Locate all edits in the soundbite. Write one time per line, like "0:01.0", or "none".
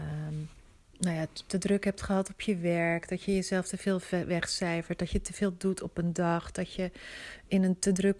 none